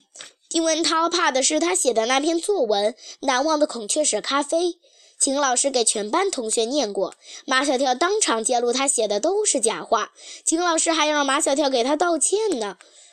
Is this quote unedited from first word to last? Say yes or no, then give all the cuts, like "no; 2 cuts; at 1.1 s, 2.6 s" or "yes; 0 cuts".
yes; 0 cuts